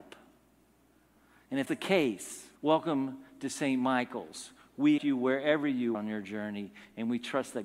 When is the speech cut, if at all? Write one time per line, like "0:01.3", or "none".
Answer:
0:01.7
0:02.6
0:05.0
0:05.9